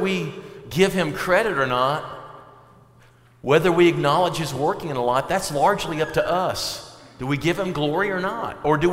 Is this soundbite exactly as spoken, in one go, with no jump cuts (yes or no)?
yes